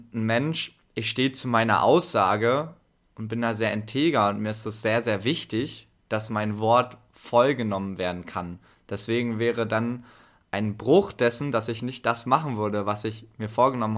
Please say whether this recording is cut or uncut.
uncut